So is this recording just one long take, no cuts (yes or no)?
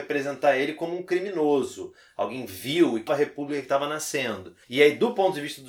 no